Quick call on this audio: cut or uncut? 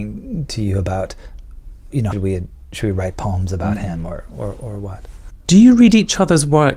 cut